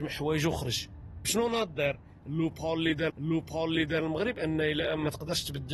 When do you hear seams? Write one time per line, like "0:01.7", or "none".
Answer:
0:01.2
0:03.1